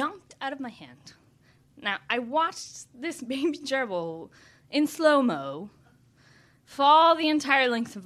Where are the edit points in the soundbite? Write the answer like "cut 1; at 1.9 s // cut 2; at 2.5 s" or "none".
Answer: none